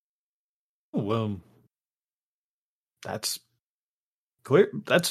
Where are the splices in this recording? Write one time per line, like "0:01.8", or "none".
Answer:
0:00.9